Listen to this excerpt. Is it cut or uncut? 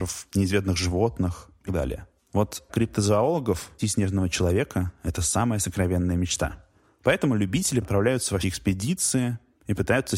cut